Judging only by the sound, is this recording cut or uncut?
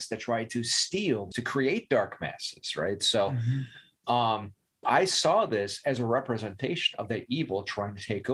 cut